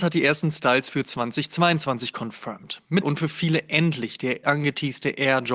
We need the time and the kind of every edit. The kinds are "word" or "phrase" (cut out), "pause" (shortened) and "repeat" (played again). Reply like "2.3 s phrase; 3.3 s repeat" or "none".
3.0 s word; 4.4 s word